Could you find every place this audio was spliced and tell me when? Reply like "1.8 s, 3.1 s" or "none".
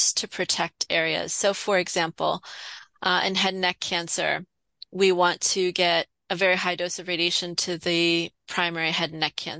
none